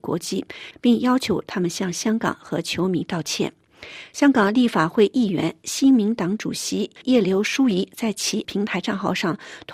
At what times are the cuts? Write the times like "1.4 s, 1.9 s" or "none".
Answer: 8.4 s